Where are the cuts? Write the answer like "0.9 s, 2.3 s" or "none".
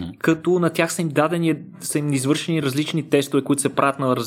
none